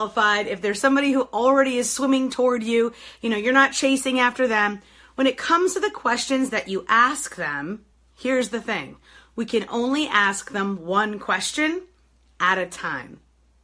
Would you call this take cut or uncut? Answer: uncut